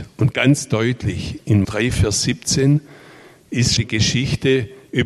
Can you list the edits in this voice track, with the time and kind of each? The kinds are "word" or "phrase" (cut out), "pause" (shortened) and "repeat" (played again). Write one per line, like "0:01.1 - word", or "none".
0:01.6 - word
0:03.8 - word